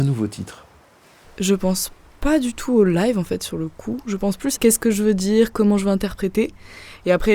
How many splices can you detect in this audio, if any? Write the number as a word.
one